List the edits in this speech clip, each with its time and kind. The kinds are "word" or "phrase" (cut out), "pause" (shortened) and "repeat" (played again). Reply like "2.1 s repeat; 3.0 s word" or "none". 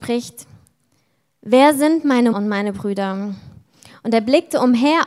2.3 s word

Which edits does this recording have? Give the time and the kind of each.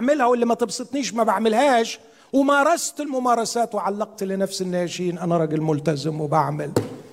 none

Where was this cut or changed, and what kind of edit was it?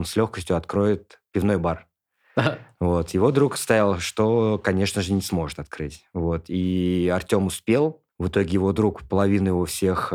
8.1 s pause

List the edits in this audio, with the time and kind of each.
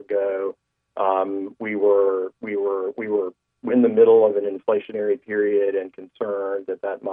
3.7 s word

